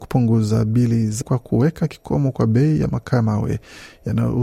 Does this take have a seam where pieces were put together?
yes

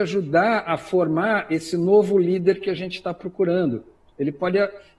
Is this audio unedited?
yes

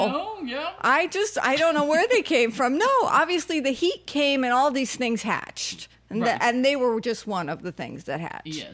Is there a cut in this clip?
no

